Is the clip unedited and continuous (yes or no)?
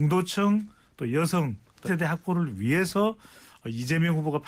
no